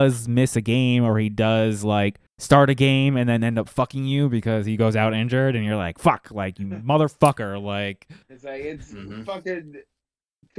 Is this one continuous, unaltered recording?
no; 2 cuts; at 2.3 s, 8.2 s

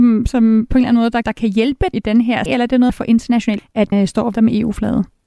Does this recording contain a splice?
yes; 7 cuts; at 1.2 s, 1.9 s, 2.5 s, 2.9 s, 3.6 s, 3.9 s, 4.3 s

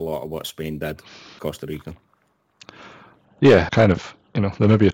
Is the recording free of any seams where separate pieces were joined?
no; 2 cuts; at 1.4 s, 3.7 s

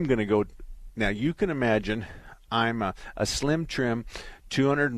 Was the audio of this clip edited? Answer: no; 0 cuts

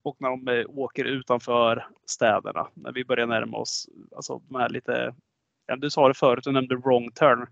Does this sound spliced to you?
no; 0 cuts

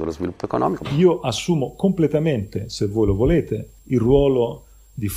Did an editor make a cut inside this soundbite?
yes; 1 cut; at 3.8 s

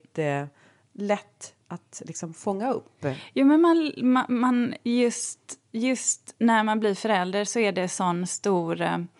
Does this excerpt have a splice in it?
no; 0 cuts

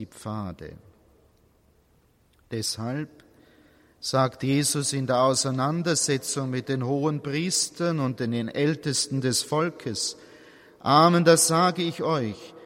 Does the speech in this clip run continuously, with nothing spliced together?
yes; 0 cuts

